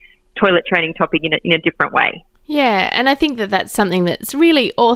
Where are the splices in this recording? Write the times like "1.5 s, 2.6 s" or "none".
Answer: 2.3 s